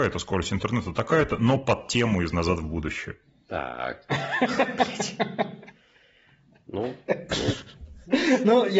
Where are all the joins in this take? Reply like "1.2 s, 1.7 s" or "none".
none